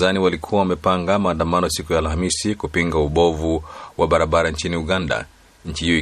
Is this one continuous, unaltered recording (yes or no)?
yes